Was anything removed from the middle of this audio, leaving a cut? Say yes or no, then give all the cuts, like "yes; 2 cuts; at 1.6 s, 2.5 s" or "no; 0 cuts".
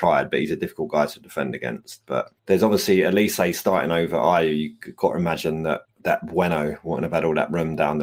yes; 2 cuts; at 2.4 s, 5.8 s